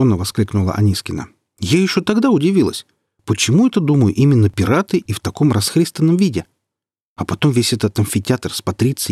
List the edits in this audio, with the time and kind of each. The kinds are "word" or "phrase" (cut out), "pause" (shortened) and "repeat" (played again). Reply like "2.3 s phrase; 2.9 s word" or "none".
none